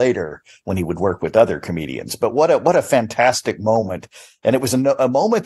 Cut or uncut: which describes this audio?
uncut